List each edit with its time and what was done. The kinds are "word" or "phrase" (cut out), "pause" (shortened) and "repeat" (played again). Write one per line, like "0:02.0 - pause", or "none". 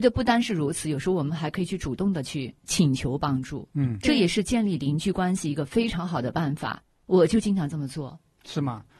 0:02.6 - pause